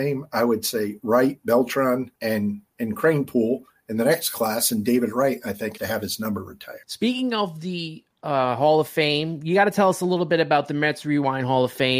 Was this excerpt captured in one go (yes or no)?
no